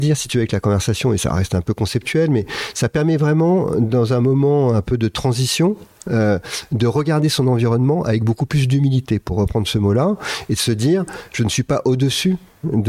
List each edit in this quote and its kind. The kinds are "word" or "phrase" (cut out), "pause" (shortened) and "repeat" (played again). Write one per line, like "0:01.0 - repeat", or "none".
none